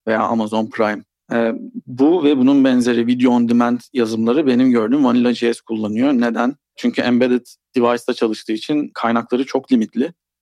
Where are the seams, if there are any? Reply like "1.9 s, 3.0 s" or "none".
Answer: none

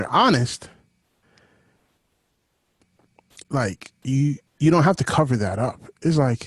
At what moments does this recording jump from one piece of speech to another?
4.5 s

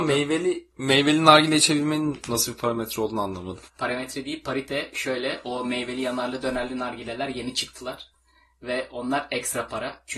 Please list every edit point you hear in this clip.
3.7 s

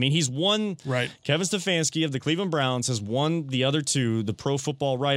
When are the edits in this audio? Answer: none

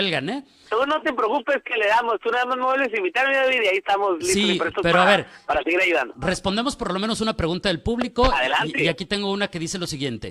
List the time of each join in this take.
none

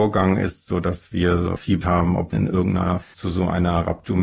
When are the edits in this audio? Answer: 1.8 s, 2.3 s, 3.0 s

